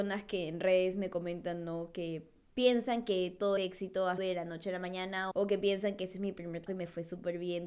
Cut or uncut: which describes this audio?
cut